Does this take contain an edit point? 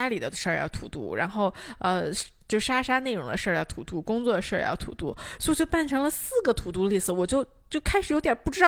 no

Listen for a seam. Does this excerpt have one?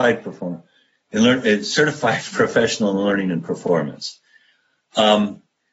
no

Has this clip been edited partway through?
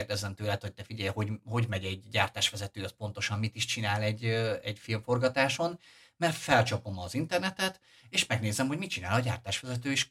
no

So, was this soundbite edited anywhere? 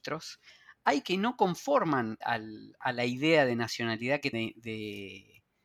yes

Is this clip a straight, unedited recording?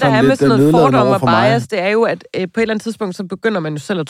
yes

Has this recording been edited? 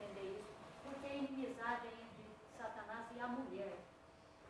no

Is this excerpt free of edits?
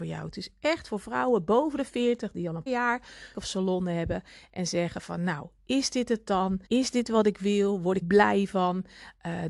no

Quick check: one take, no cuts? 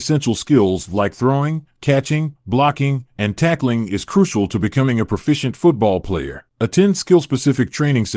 no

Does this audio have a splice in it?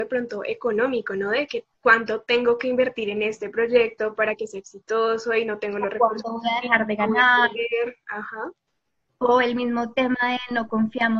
no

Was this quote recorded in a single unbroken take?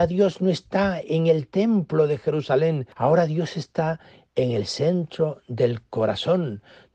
yes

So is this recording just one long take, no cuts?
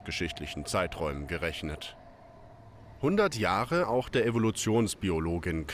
no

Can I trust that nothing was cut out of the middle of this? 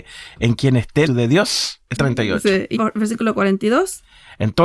no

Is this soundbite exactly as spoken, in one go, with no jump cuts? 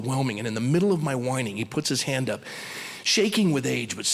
yes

